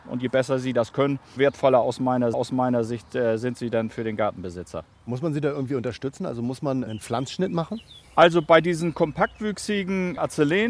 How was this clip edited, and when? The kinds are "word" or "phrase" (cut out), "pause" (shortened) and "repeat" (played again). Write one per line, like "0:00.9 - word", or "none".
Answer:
0:01.4 - word
0:02.3 - repeat
0:06.9 - word